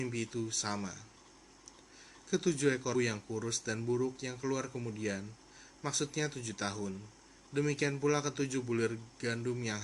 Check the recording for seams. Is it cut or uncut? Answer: cut